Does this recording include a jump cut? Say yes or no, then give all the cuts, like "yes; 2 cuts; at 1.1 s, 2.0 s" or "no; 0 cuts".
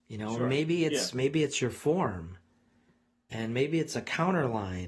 no; 0 cuts